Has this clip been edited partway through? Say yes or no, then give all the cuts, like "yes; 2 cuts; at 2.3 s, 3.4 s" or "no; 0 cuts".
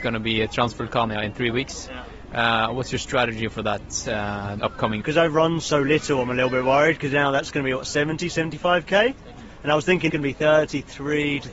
yes; 3 cuts; at 4.6 s, 5.0 s, 10.1 s